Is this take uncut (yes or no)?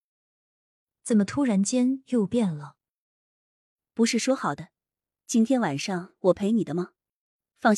yes